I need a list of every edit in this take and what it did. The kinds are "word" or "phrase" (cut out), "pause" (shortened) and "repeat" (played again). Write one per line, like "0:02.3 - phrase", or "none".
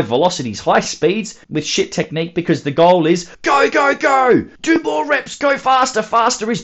0:01.4 - pause
0:03.3 - pause
0:04.6 - pause